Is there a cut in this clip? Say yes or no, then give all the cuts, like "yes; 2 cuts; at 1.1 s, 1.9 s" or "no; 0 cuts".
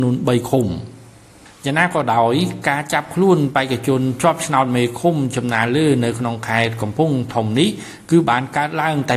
no; 0 cuts